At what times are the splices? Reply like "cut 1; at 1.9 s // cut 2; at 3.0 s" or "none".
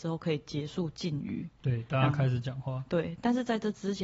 none